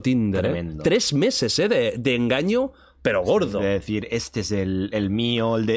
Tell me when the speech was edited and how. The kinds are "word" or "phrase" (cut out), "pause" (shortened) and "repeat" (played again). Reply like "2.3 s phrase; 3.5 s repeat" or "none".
none

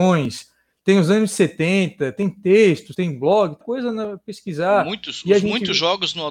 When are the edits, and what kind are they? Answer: 3.6 s word

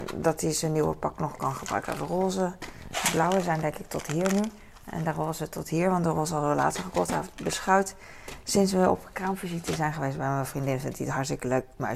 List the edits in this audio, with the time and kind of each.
none

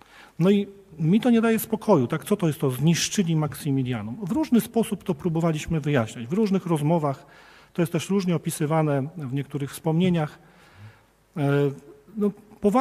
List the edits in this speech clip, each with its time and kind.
none

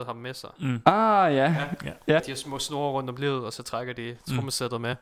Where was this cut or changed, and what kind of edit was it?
2.2 s word

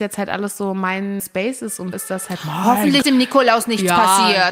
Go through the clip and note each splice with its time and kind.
1.2 s word; 1.9 s word; 3.0 s word

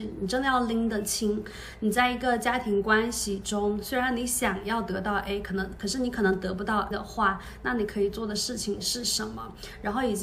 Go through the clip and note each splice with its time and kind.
6.9 s word

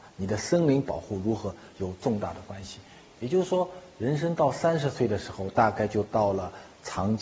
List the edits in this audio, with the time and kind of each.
none

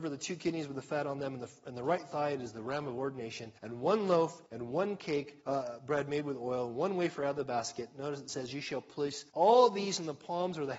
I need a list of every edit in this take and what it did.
3.6 s pause; 4.5 s pause; 5.4 s pause; 9.3 s pause

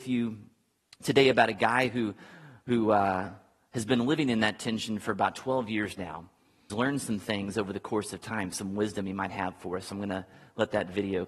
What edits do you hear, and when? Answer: 6.7 s phrase

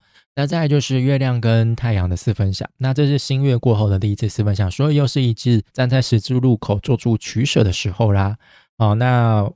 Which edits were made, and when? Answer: 5.7 s pause

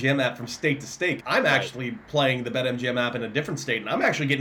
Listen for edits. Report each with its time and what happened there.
1.2 s word

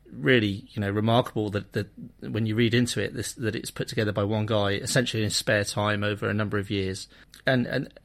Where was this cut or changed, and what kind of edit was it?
none

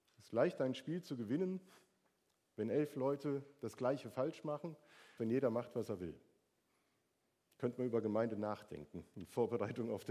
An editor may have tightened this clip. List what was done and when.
5.2 s word

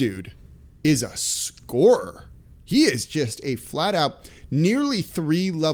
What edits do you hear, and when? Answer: none

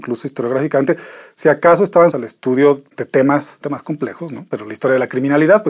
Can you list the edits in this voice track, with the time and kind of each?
2.1 s word; 3.6 s word

